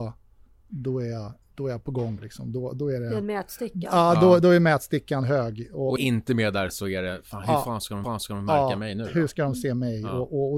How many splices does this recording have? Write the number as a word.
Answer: three